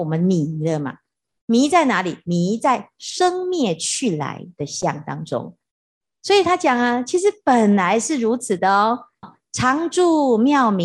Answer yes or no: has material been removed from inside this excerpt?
yes